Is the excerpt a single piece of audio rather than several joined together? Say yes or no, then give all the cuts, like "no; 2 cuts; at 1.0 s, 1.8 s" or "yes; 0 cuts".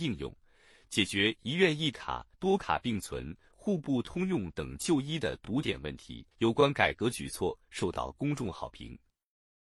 no; 2 cuts; at 2.3 s, 6.3 s